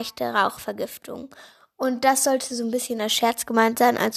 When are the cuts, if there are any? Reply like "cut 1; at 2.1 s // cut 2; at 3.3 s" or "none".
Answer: none

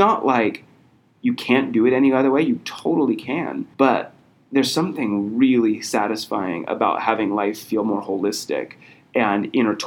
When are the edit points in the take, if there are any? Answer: cut 1; at 3.7 s

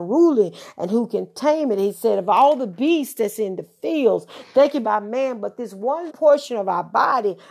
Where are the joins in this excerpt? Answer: cut 1; at 4.8 s // cut 2; at 6.1 s

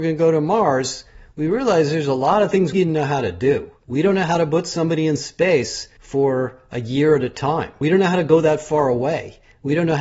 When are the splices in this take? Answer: cut 1; at 2.7 s

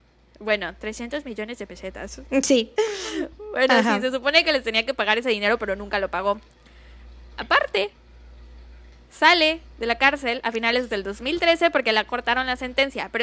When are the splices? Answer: none

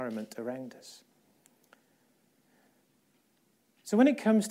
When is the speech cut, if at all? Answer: none

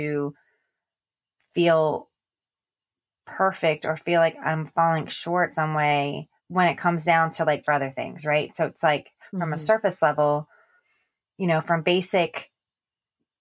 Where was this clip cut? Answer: cut 1; at 5.5 s // cut 2; at 6.4 s // cut 3; at 7.6 s

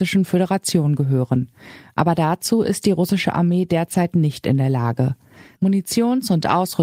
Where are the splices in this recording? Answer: none

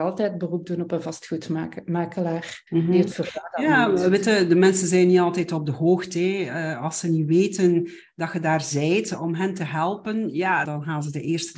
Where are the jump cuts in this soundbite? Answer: cut 1; at 2.7 s // cut 2; at 10.6 s

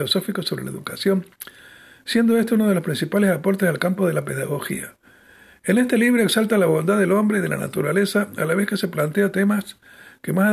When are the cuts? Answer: none

